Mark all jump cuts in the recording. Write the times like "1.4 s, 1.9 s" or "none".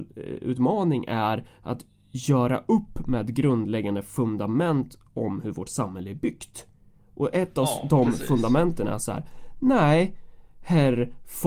none